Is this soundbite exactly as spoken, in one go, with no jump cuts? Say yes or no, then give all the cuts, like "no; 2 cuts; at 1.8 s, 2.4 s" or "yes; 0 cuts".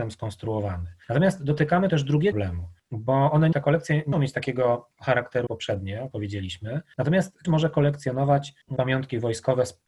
no; 8 cuts; at 1.9 s, 2.3 s, 3.5 s, 4.1 s, 5.5 s, 6.1 s, 7.4 s, 8.8 s